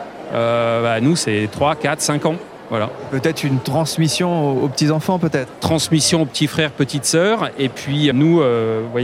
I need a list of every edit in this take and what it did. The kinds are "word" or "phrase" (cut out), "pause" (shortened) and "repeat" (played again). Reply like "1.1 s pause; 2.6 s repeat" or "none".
8.1 s word